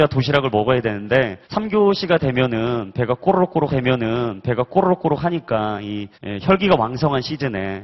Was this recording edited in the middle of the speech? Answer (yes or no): yes